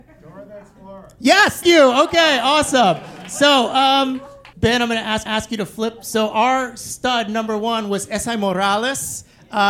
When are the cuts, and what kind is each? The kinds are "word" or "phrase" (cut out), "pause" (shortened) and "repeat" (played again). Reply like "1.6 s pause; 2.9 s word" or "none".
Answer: 1.6 s word; 4.5 s pause; 5.3 s repeat